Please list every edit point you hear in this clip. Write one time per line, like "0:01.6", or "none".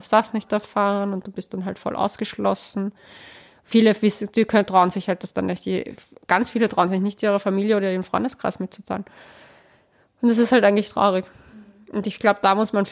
none